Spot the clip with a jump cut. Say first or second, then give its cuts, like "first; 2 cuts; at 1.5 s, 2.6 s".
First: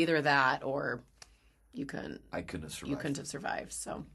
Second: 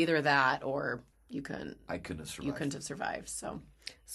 second; 1 cut; at 1.1 s